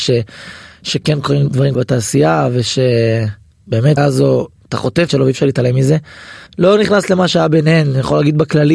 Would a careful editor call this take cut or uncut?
cut